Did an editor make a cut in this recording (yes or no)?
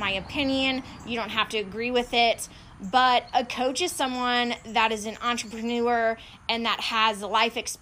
no